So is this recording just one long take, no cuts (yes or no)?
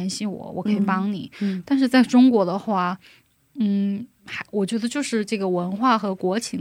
yes